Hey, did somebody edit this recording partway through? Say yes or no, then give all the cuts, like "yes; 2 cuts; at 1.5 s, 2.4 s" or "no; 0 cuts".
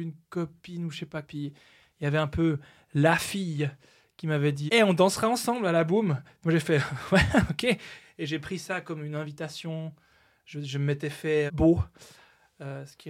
yes; 3 cuts; at 1.2 s, 4.7 s, 11.5 s